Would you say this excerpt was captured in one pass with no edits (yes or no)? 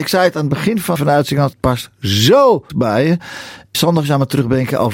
no